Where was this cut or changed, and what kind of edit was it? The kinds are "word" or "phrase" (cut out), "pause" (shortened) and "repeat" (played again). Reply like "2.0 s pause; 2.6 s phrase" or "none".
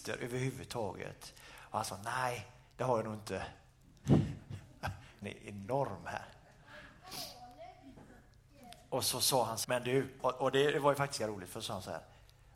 5.2 s word; 9.6 s word; 11.2 s word